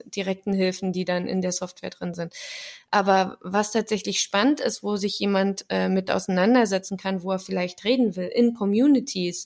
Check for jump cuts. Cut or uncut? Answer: uncut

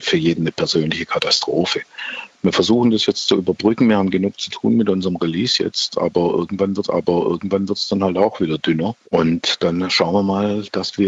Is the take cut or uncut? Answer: cut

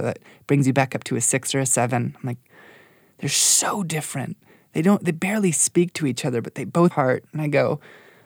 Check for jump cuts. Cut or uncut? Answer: cut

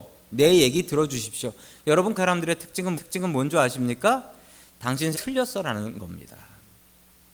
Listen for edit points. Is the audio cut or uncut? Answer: cut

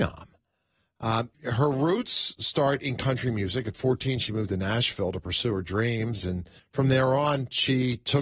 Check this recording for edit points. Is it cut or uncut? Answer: cut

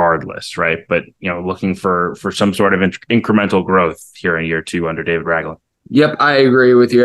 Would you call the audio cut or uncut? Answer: uncut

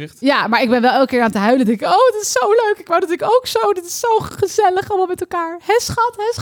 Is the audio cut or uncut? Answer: uncut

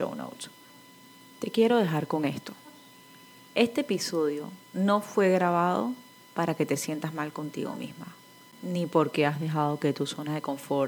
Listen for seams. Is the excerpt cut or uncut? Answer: uncut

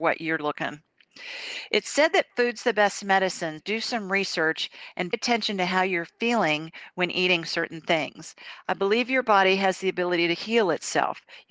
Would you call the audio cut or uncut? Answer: cut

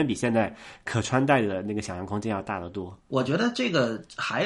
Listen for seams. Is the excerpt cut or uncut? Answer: cut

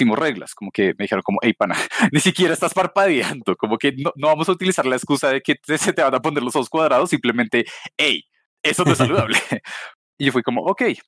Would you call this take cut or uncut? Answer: uncut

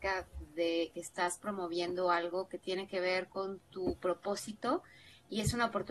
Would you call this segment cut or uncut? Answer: uncut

